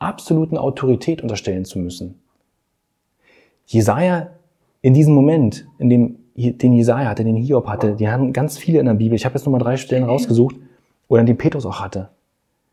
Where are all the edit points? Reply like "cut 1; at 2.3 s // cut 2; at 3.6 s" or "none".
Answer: none